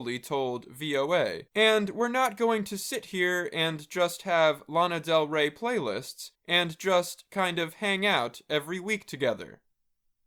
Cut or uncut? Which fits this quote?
cut